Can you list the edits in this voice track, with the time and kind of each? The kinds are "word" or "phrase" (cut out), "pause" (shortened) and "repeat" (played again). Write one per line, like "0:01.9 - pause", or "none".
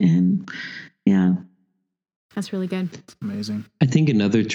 none

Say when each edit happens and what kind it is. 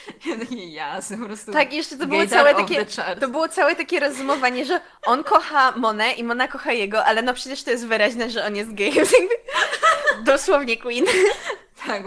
none

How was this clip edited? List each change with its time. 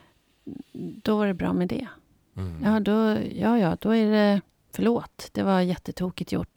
none

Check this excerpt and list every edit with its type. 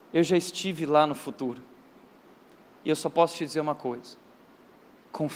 none

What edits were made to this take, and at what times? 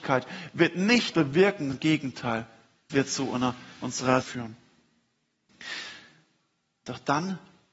0:01.1 - word
0:01.7 - word
0:02.9 - word
0:04.2 - word

